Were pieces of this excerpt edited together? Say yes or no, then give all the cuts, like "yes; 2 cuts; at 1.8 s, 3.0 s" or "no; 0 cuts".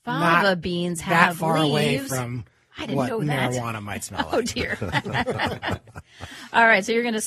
no; 0 cuts